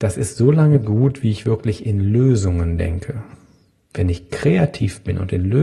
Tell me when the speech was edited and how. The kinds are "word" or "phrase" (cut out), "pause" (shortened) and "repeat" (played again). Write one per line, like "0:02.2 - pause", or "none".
none